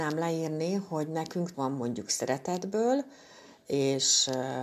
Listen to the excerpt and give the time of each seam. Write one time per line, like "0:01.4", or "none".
0:01.5